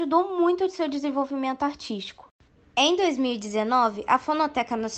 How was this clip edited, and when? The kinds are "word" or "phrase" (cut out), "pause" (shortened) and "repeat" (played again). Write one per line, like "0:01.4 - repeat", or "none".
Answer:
0:02.5 - pause